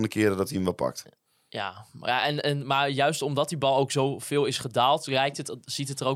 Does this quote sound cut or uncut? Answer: uncut